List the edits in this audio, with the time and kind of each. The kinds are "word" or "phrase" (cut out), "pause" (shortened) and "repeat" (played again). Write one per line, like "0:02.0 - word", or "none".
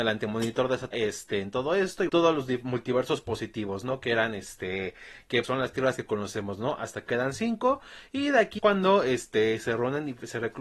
0:00.9 - phrase
0:02.1 - phrase
0:05.4 - word
0:07.1 - word
0:08.6 - word